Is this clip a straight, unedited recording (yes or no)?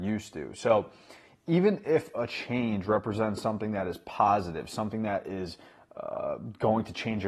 yes